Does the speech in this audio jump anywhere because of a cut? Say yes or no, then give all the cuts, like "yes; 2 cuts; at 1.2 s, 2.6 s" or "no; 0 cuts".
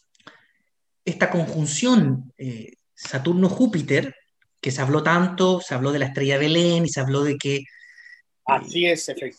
no; 0 cuts